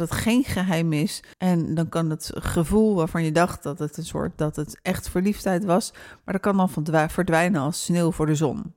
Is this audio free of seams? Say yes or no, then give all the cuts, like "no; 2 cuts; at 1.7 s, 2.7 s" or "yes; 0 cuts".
no; 1 cut; at 1.3 s